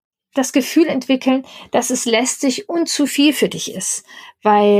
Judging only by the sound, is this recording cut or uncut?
uncut